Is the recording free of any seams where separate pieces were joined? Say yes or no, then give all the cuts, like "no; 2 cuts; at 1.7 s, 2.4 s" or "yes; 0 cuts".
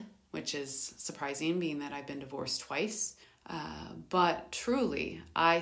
no; 1 cut; at 3.2 s